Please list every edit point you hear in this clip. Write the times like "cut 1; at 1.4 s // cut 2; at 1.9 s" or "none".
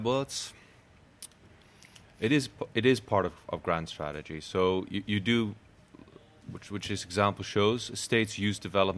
none